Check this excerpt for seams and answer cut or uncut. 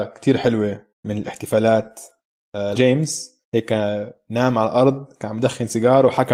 cut